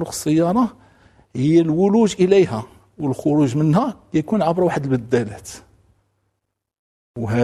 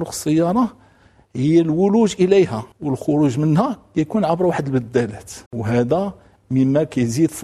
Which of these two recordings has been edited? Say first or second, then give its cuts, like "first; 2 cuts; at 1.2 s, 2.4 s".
second; 2 cuts; at 2.7 s, 5.5 s